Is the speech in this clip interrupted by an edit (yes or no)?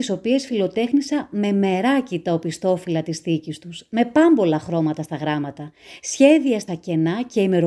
yes